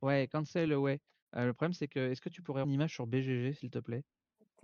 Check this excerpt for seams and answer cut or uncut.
cut